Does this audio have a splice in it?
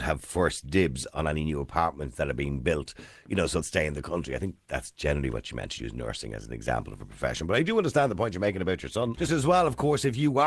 yes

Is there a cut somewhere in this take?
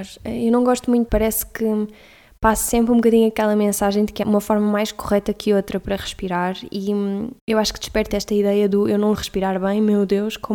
yes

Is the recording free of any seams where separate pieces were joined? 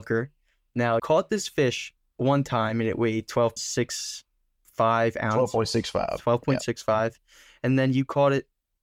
no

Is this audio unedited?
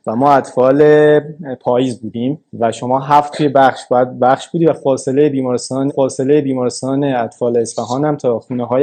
no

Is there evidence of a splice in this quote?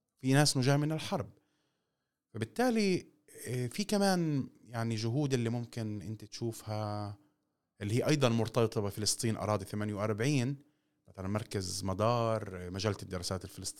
no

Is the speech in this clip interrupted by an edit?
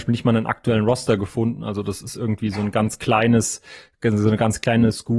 no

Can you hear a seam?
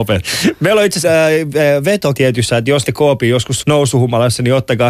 yes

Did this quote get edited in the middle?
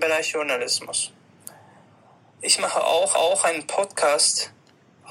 yes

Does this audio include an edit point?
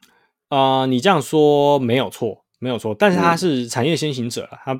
no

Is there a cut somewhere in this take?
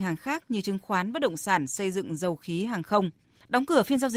no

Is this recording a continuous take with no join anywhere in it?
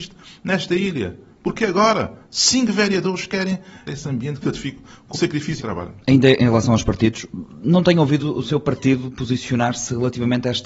no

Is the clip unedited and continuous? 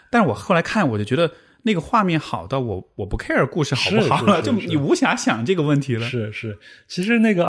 yes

